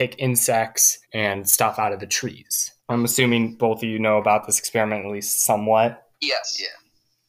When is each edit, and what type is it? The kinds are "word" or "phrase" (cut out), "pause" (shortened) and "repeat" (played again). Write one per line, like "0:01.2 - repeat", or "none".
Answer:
0:01.0 - pause
0:02.8 - pause
0:06.1 - pause

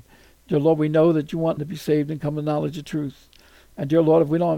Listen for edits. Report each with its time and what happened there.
0:01.6 - phrase

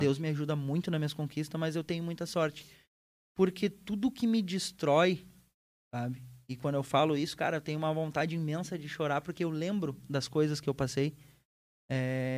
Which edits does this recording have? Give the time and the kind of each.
none

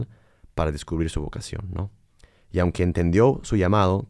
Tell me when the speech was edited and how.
none

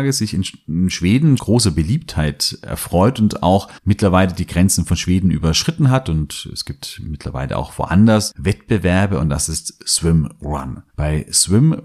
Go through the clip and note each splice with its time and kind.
0:01.4 - word
0:03.8 - pause
0:10.9 - pause

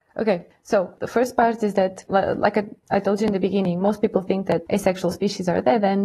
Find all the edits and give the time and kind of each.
none

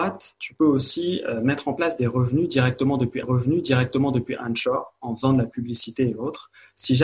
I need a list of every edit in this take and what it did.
0:03.2 - repeat

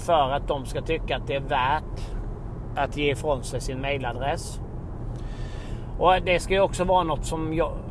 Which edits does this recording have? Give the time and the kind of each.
none

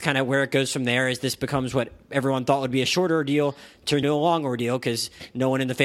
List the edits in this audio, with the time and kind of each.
0:04.0 - word

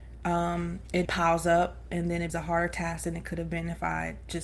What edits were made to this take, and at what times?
0:01.0 - word
0:02.3 - word

